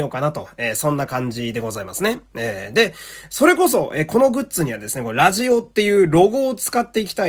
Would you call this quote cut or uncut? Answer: uncut